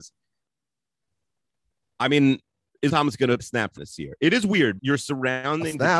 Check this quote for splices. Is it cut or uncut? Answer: cut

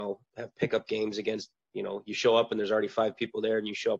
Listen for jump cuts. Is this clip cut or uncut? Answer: uncut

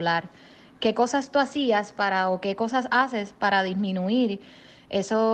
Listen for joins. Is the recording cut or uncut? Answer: uncut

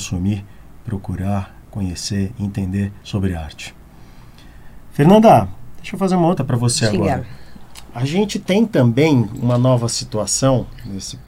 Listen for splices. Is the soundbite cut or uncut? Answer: cut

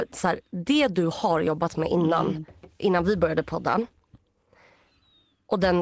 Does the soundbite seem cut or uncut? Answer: uncut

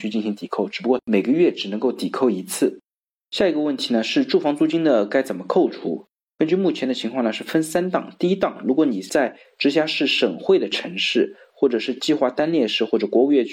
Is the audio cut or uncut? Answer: uncut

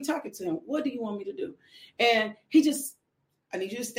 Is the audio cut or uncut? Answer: uncut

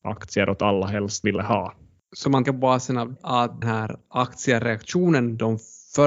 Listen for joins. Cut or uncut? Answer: cut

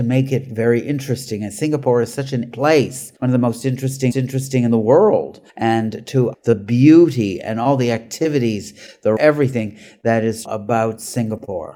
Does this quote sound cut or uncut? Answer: cut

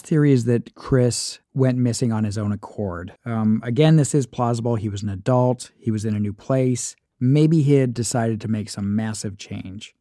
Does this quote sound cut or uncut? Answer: cut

